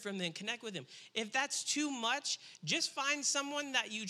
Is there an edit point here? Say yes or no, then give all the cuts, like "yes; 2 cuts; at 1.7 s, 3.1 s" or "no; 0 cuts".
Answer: no; 0 cuts